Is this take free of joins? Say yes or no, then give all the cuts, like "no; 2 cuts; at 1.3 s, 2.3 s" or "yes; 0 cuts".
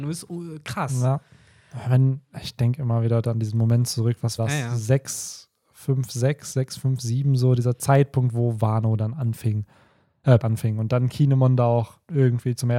no; 2 cuts; at 4.4 s, 10.4 s